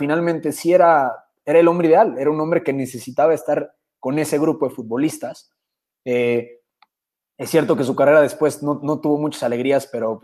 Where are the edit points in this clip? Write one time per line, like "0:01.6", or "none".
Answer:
none